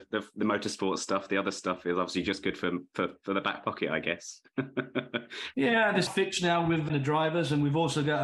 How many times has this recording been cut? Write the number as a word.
two